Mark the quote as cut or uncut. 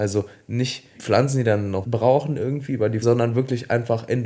cut